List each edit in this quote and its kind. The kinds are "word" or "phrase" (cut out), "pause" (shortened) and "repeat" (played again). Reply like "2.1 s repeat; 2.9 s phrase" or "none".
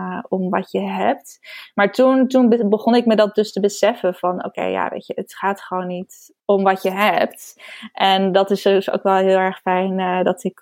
6.4 s pause